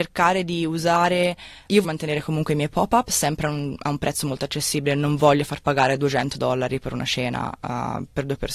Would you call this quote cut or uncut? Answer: cut